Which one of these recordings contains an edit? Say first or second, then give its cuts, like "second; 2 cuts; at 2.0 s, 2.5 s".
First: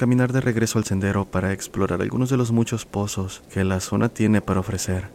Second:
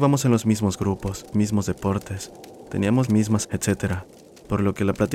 second; 3 cuts; at 1.3 s, 3.1 s, 3.4 s